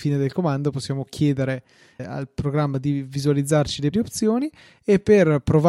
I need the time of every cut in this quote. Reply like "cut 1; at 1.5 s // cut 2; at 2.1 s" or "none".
cut 1; at 2.0 s // cut 2; at 3.9 s